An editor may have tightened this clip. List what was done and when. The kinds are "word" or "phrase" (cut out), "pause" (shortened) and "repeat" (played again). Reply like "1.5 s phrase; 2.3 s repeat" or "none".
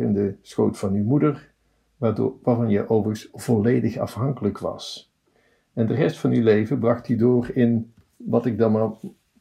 none